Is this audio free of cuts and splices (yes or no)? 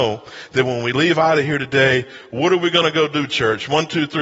yes